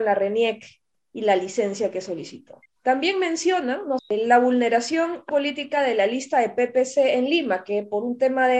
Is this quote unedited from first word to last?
no; 3 cuts; at 2.7 s, 4.0 s, 5.3 s

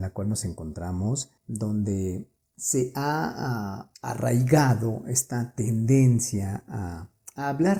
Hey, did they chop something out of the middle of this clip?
no; 0 cuts

